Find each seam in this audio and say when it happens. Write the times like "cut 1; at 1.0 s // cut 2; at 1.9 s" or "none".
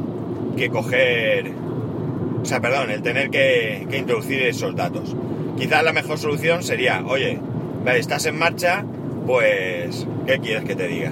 none